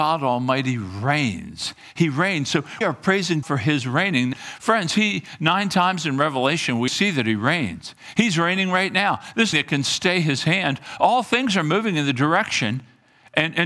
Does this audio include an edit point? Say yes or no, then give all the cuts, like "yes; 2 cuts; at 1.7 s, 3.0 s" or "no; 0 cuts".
yes; 5 cuts; at 2.8 s, 3.4 s, 4.3 s, 6.9 s, 9.5 s